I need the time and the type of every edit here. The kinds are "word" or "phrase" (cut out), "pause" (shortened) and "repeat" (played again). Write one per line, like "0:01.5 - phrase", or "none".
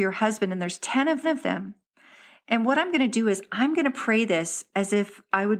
0:01.2 - repeat

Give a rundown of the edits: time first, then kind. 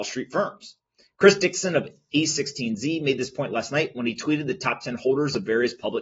none

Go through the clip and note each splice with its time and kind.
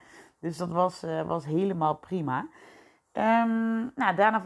none

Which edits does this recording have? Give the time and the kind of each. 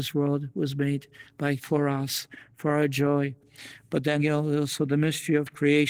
0:01.6 - word
0:04.2 - word

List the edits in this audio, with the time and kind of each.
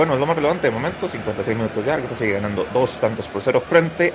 0:02.1 - word

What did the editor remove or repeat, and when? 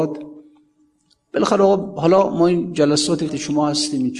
0:03.3 - word

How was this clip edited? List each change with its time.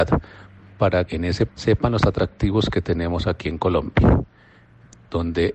0:01.1 - word
0:01.5 - word

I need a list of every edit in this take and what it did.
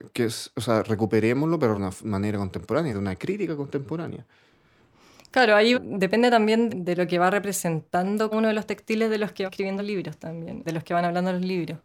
0:01.8 - word
0:02.9 - word
0:05.7 - word
0:06.7 - word
0:08.3 - word
0:09.5 - word
0:09.8 - word
0:10.7 - word

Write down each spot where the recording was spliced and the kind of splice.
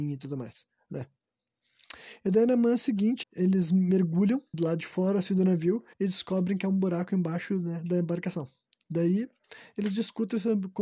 0:03.2 - word
0:04.5 - word
0:05.9 - pause

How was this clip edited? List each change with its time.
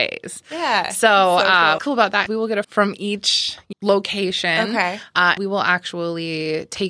0:01.8 - word
0:02.3 - word
0:02.6 - word
0:03.7 - word
0:05.4 - word

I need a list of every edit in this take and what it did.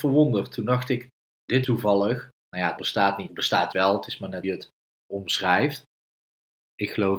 0:01.3 - word
0:01.6 - word
0:02.8 - word
0:03.3 - word
0:03.7 - word
0:04.4 - word

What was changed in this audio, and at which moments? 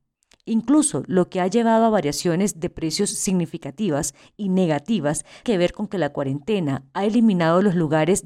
0:05.4 - word

